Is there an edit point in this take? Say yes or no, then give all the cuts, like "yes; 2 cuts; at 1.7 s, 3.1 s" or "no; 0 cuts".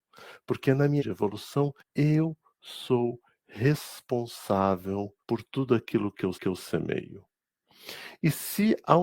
yes; 4 cuts; at 1.0 s, 1.8 s, 5.2 s, 6.3 s